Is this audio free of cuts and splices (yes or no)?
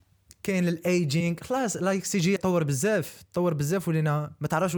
no